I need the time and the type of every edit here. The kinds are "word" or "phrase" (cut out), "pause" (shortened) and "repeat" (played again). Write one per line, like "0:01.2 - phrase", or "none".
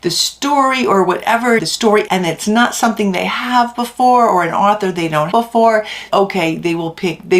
0:01.6 - phrase
0:02.1 - phrase
0:05.3 - word
0:06.1 - word